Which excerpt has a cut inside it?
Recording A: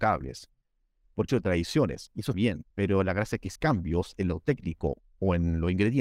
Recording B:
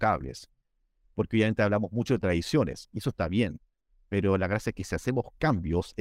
A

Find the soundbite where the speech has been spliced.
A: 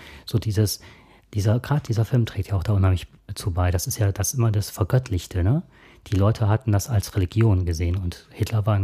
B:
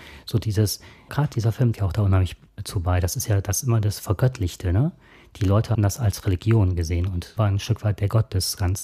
B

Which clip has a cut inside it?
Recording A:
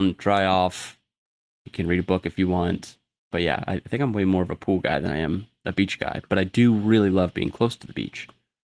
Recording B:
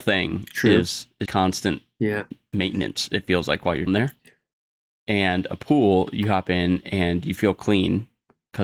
B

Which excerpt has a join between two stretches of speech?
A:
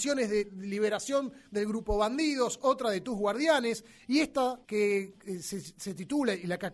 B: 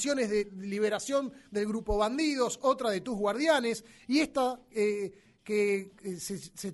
A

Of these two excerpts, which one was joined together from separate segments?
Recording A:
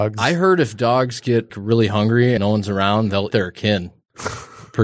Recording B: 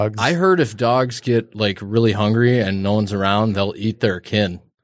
A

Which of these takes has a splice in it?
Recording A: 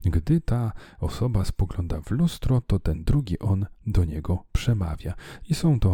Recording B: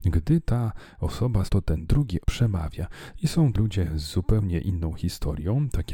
B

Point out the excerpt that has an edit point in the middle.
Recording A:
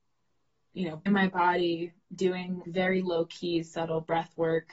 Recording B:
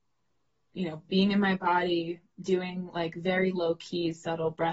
A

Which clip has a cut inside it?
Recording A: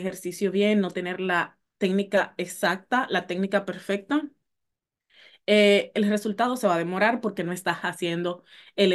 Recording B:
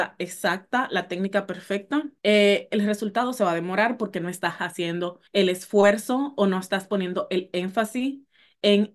B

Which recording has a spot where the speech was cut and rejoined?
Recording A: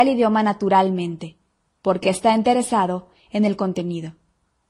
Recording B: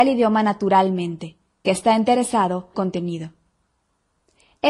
B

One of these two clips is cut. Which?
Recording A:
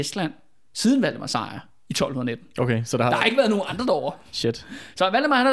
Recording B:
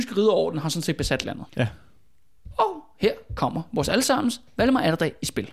B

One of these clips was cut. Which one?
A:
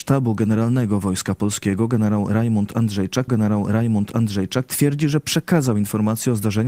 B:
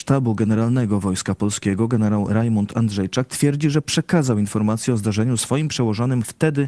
A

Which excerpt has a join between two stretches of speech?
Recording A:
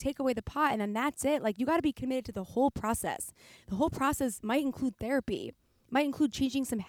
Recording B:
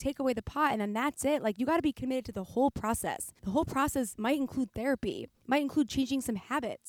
B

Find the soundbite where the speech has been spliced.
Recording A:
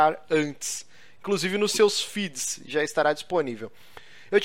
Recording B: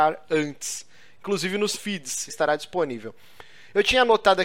B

